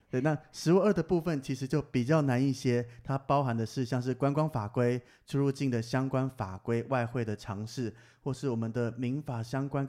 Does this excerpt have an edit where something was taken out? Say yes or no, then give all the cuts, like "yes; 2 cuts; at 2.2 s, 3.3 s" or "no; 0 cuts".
no; 0 cuts